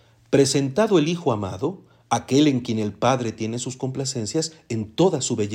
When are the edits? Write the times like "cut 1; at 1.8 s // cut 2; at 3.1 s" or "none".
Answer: none